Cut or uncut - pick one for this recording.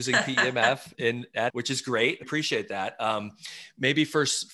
cut